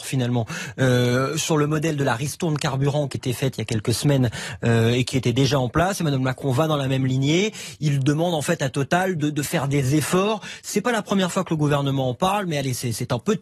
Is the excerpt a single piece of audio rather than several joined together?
no; 1 cut; at 3.1 s

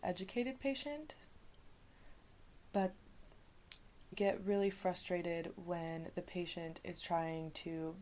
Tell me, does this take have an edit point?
yes; 1 cut; at 4.1 s

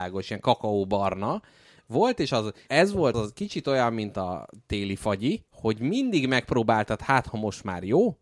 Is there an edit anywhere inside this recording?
yes; 3 cuts; at 2.7 s, 3.1 s, 5.5 s

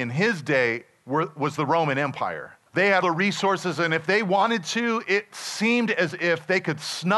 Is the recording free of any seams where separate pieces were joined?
no; 2 cuts; at 2.7 s, 3.0 s

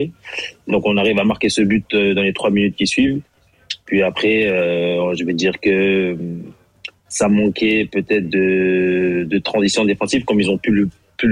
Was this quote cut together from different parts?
no; 0 cuts

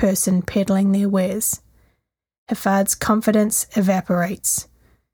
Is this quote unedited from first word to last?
yes; 0 cuts

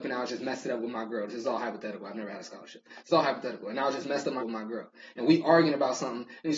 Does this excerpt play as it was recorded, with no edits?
no; 1 cut; at 4.4 s

